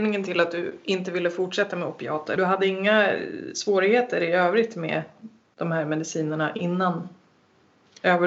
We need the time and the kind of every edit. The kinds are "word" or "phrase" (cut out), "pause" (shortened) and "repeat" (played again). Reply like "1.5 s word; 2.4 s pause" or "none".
2.4 s word; 5.4 s word